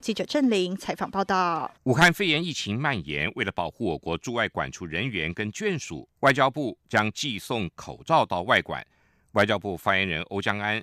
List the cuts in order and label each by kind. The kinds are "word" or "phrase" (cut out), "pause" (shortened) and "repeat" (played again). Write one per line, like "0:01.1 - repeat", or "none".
0:01.8 - pause
0:06.2 - pause

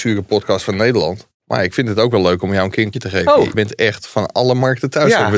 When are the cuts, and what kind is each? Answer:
0:01.3 - pause
0:02.9 - word
0:03.5 - word

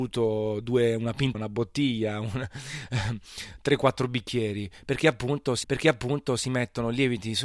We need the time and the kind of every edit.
0:01.3 - phrase
0:05.6 - repeat

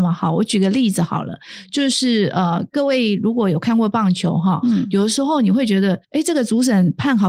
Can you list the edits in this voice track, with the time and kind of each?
0:06.0 - pause

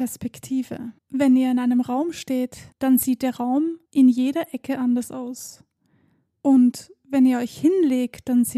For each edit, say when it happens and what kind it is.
0:01.0 - pause
0:02.7 - pause
0:03.8 - pause

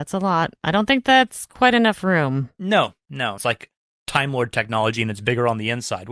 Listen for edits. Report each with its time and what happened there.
0:03.4 - phrase

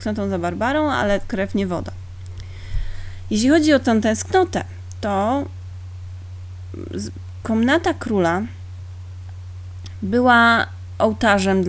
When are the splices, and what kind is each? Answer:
none

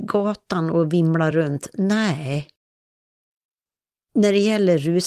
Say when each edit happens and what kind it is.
none

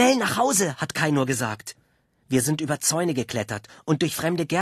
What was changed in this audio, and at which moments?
none

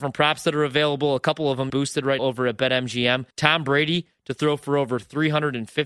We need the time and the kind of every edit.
0:01.7 - word
0:02.2 - word
0:03.3 - pause

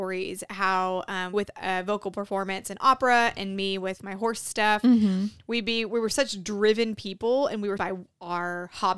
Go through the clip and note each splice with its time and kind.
0:01.3 - word
0:07.8 - phrase

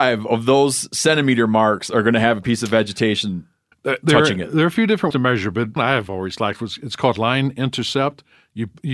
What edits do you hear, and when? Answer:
0:03.7 - pause
0:05.1 - word
0:05.8 - phrase

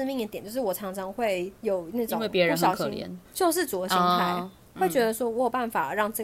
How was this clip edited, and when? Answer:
0:01.6 - pause
0:03.2 - pause
0:04.7 - pause

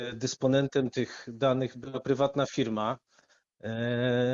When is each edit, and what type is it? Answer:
none

